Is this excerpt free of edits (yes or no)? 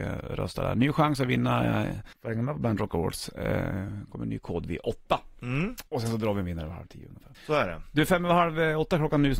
no